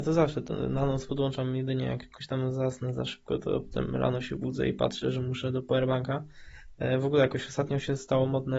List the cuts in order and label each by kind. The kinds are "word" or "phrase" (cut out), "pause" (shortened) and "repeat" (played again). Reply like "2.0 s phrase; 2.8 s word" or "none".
none